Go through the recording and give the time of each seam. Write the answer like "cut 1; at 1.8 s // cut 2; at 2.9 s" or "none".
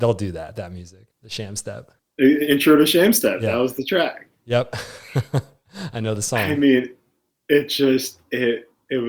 cut 1; at 1.1 s // cut 2; at 2.0 s